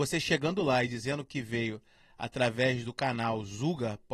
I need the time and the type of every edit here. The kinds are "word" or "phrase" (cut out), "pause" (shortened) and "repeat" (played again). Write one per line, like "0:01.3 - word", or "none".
none